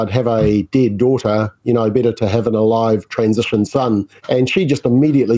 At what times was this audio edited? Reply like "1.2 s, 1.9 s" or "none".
4.2 s